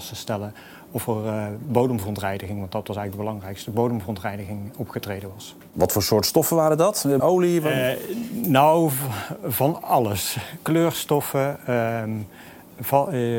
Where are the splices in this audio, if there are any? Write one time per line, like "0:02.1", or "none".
0:07.2